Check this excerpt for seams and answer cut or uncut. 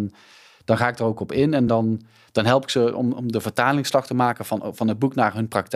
uncut